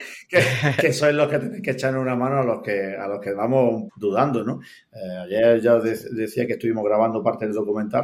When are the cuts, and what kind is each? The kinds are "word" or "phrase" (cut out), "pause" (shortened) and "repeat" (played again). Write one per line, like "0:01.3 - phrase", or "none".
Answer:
0:03.9 - word